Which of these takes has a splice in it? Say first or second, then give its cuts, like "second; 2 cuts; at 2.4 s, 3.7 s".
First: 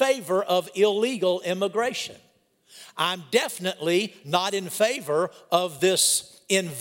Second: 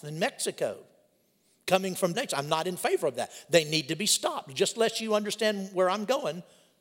second; 1 cut; at 2.1 s